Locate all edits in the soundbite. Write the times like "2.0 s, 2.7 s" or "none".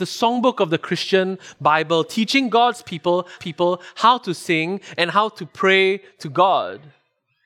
3.4 s

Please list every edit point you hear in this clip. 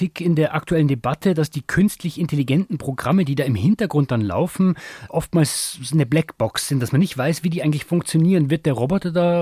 none

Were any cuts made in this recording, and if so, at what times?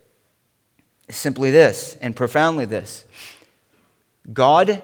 none

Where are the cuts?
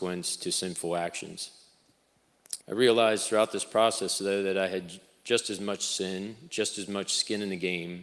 2.6 s

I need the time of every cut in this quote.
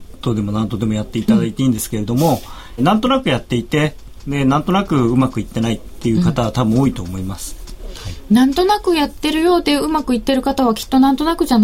2.8 s

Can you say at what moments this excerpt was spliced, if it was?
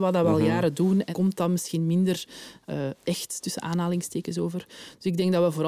1.1 s

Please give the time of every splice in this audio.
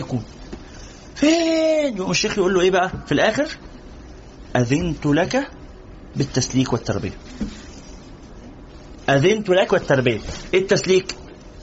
9.7 s

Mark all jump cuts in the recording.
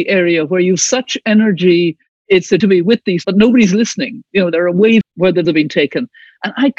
2.6 s, 3.2 s, 5.0 s, 5.4 s

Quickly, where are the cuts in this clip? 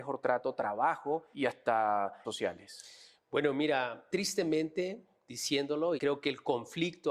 1.3 s, 2.2 s, 4.1 s, 6.0 s

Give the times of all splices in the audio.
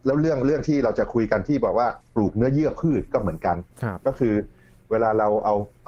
none

